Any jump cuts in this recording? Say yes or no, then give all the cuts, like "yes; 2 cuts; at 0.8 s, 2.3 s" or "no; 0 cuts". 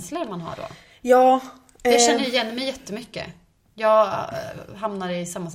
no; 0 cuts